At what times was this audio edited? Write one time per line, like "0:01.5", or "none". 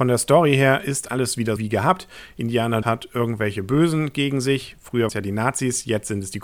0:01.1
0:01.6
0:02.8
0:05.1